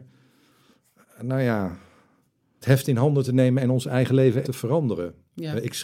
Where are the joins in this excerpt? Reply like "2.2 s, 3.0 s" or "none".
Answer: 2.6 s, 4.4 s